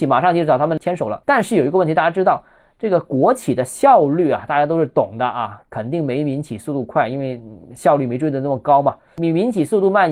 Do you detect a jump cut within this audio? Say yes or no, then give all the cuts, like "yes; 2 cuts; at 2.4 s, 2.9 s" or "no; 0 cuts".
yes; 1 cut; at 1.2 s